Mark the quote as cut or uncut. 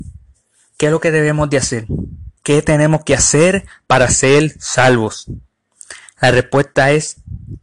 cut